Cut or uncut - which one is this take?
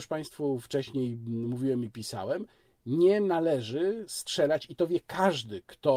uncut